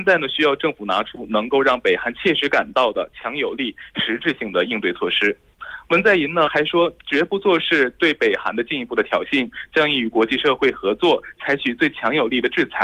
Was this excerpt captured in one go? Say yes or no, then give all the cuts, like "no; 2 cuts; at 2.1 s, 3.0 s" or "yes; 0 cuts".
no; 1 cut; at 7.0 s